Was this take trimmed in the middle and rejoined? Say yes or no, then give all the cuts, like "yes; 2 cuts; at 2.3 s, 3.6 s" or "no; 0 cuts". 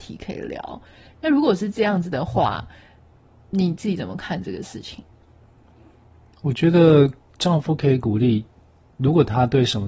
no; 0 cuts